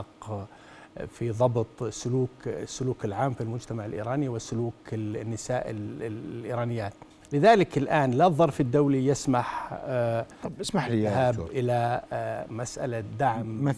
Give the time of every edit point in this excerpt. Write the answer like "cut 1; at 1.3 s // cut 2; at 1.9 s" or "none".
cut 1; at 7.1 s